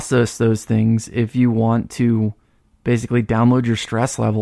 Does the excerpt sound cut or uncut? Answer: uncut